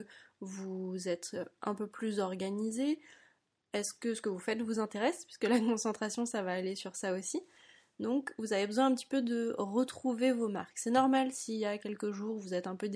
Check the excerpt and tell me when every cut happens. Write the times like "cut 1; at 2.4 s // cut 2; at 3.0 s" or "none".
none